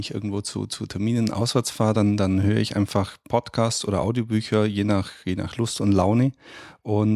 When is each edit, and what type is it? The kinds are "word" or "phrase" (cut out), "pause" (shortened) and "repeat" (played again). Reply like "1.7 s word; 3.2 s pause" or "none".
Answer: none